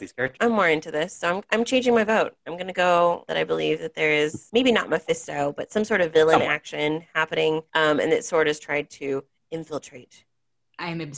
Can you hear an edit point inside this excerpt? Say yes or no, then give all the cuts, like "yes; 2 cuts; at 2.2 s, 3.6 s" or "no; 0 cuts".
no; 0 cuts